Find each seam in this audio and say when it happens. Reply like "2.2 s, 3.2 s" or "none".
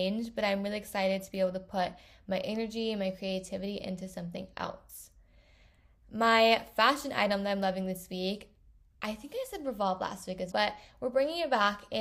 10.5 s

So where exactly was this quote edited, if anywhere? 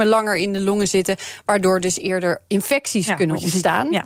none

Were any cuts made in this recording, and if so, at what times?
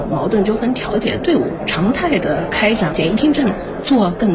none

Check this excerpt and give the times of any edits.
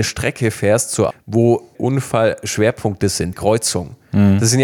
1.1 s, 1.7 s, 3.3 s

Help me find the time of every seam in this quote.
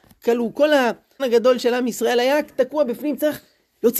1.2 s

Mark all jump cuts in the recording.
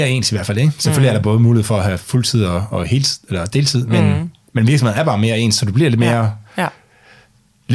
none

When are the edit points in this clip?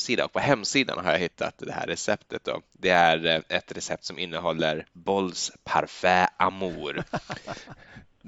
4.9 s

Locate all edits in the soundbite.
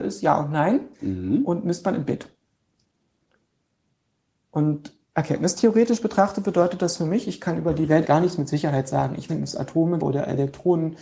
0.9 s, 5.0 s, 8.0 s, 9.3 s, 10.0 s

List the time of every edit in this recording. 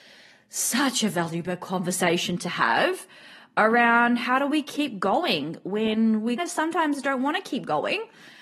6.4 s

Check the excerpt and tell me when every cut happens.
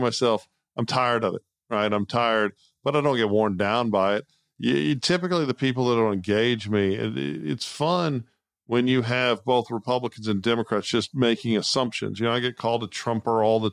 none

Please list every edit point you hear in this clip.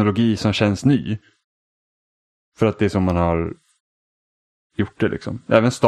none

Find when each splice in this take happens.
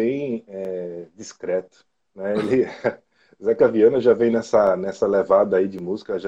2.0 s

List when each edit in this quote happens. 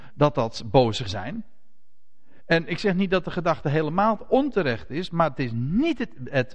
1.1 s

